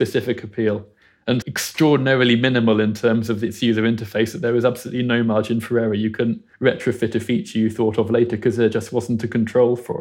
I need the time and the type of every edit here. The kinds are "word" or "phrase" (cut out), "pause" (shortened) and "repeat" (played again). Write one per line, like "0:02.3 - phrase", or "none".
0:01.4 - word
0:06.5 - pause